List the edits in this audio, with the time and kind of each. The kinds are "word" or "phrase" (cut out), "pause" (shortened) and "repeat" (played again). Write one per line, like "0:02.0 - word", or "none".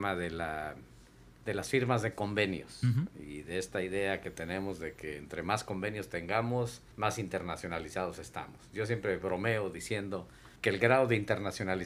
0:06.9 - pause
0:10.6 - pause